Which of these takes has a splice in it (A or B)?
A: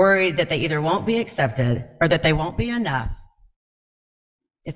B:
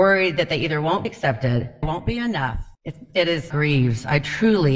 B